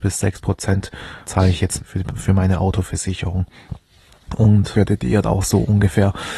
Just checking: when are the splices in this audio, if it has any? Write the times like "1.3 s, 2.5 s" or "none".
1.2 s, 1.8 s, 4.7 s, 5.2 s